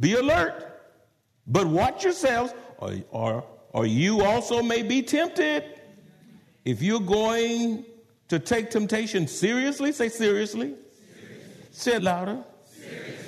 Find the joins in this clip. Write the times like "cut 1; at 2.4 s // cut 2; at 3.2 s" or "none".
cut 1; at 11.7 s // cut 2; at 12.0 s

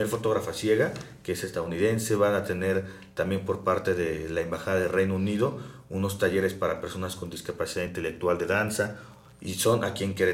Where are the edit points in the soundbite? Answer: none

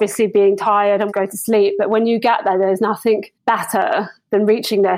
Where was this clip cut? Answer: cut 1; at 1.1 s // cut 2; at 3.3 s

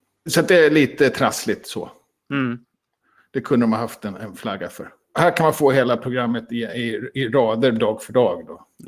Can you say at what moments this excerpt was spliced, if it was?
none

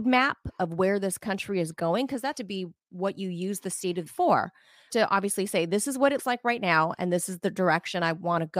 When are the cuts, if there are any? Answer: cut 1; at 2.3 s // cut 2; at 4.1 s // cut 3; at 4.9 s // cut 4; at 6.2 s

